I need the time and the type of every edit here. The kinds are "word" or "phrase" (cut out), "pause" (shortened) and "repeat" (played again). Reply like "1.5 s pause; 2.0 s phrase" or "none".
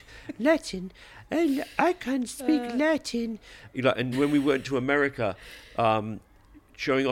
4.1 s word